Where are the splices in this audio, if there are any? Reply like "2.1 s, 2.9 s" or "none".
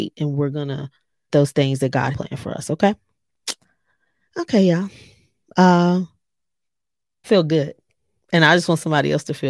1.3 s, 2.1 s, 7.2 s